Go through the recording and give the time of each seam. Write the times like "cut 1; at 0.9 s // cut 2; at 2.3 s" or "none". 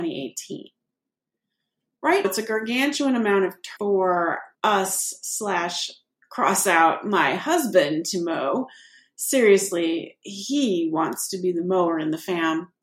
cut 1; at 2.2 s // cut 2; at 3.8 s // cut 3; at 4.5 s